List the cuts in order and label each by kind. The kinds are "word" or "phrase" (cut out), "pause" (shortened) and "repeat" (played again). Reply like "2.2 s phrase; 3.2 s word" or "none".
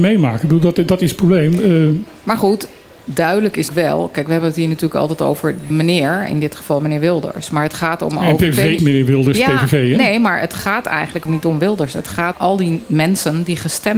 3.7 s word; 5.7 s word; 8.8 s word; 11.3 s word; 12.3 s word